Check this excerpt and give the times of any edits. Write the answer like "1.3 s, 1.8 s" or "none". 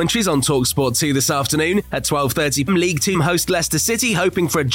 2.7 s, 3.1 s

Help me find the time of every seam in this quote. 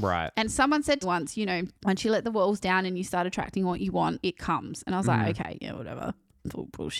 1.0 s, 1.8 s, 4.2 s

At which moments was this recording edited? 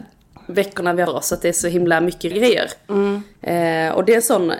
1.1 s, 2.3 s

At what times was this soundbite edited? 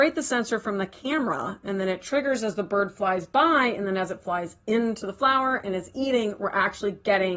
none

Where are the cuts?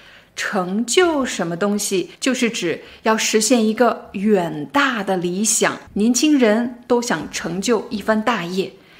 2.1 s, 5.9 s

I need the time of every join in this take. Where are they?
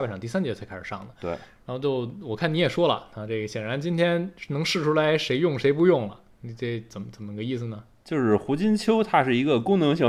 none

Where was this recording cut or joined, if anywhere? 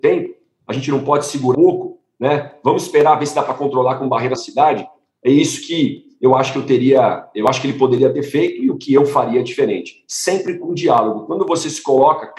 1.5 s, 4.4 s

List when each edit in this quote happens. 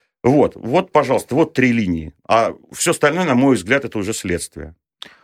0.9 s

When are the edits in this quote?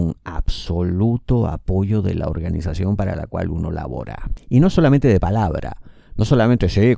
none

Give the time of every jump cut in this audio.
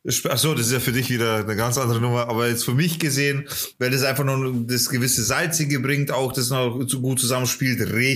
none

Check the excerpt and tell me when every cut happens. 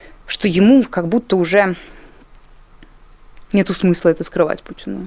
none

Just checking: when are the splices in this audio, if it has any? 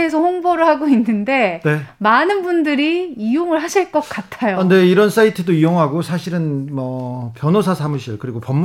none

